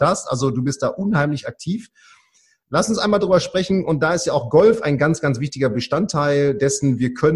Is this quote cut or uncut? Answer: uncut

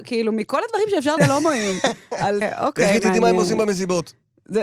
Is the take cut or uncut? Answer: cut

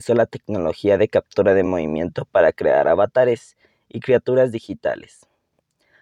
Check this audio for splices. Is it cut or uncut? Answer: uncut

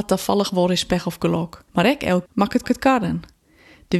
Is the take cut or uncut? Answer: cut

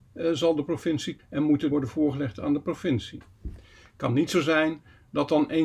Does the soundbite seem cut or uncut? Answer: cut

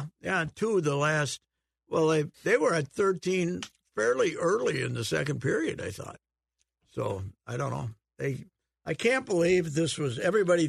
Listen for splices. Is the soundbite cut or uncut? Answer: cut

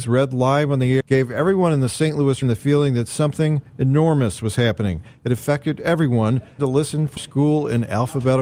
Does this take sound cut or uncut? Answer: cut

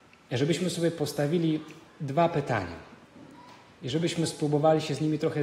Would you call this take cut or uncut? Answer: uncut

